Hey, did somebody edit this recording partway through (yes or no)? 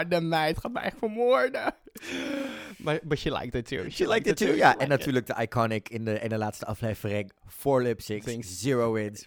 no